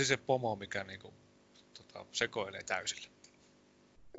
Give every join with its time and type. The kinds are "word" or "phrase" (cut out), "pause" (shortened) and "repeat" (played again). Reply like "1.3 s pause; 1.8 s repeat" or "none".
none

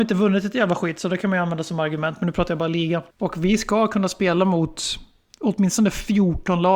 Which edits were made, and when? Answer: 3.1 s pause

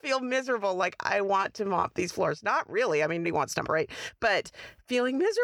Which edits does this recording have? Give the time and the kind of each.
3.2 s word; 3.6 s word

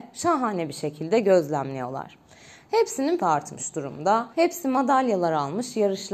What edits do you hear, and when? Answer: 3.2 s word; 4.3 s pause

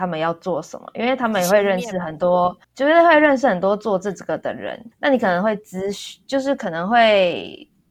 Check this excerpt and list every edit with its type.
2.6 s pause; 4.9 s pause

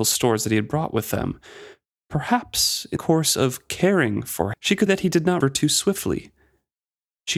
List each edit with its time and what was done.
3.0 s word; 4.5 s word; 4.9 s word; 5.4 s word

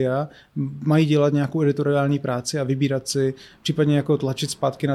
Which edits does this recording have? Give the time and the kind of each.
none

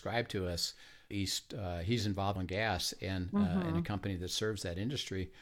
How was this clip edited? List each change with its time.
1.1 s phrase; 2.4 s phrase

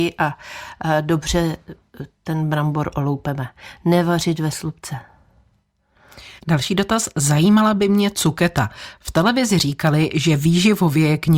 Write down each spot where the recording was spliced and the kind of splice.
6.4 s pause

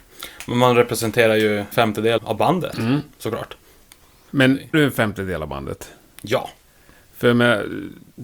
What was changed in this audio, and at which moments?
1.7 s word; 2.2 s word; 4.7 s word

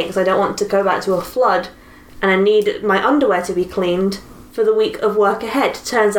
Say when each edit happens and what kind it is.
none

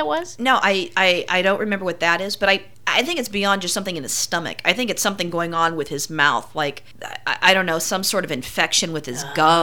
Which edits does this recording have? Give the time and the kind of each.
none

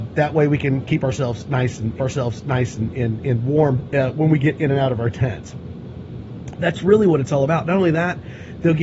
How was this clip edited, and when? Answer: 2.0 s repeat

